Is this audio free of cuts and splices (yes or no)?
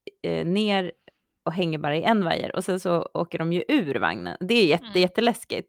yes